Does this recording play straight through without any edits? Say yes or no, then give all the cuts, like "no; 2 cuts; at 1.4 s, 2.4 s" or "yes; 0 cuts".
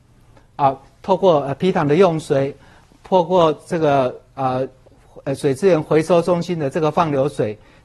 yes; 0 cuts